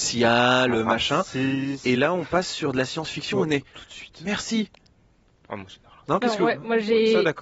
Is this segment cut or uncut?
uncut